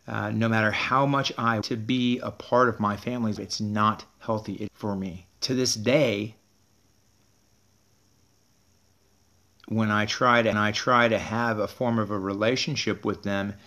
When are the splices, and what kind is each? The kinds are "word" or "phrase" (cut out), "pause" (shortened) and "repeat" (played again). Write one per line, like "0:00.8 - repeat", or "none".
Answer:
0:01.6 - word
0:03.4 - word
0:04.7 - phrase
0:05.3 - pause
0:10.5 - repeat

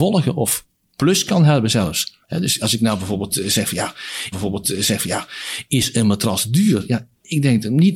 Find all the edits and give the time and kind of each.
0:02.2 - pause
0:04.3 - repeat

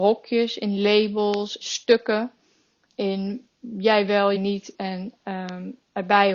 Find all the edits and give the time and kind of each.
0:01.6 - word
0:02.9 - word
0:04.4 - word

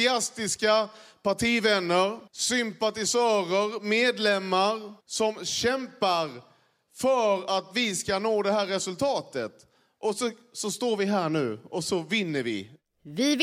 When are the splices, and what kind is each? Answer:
0:02.3 - pause
0:05.0 - pause

